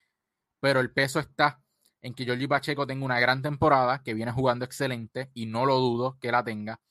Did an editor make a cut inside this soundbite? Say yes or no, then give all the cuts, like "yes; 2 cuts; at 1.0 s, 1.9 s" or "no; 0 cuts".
no; 0 cuts